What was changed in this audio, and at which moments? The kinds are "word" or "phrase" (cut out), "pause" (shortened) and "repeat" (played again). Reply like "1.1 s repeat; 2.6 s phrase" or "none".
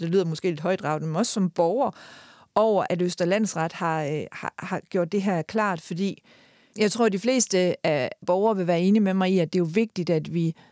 2.9 s word; 8.2 s word